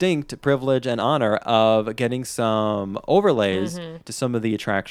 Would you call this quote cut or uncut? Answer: uncut